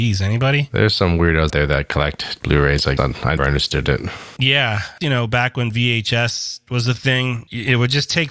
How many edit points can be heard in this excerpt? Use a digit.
4